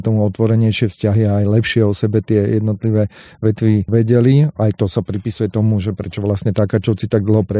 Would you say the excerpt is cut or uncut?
uncut